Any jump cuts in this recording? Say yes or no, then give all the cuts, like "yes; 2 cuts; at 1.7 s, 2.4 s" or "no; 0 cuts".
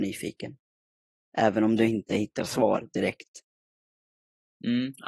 no; 0 cuts